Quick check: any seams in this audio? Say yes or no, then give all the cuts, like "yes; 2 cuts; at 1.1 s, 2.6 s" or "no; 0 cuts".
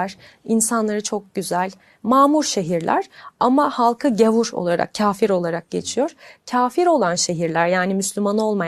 no; 0 cuts